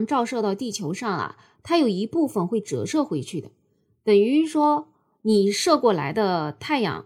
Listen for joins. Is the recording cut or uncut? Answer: uncut